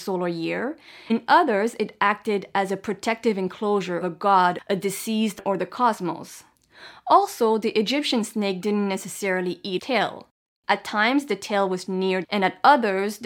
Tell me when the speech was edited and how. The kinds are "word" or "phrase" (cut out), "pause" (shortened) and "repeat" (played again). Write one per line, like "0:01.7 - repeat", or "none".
0:01.1 - word
0:04.0 - word
0:09.8 - word
0:11.9 - word
0:12.2 - word